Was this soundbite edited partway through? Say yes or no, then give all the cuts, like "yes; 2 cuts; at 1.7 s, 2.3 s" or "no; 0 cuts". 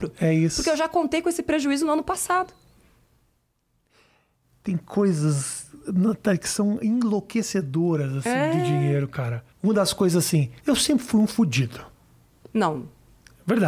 yes; 2 cuts; at 9.5 s, 10.6 s